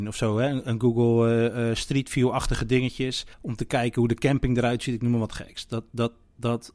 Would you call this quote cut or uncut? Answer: cut